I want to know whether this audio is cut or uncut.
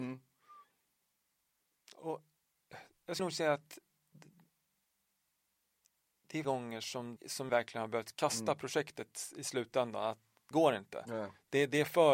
cut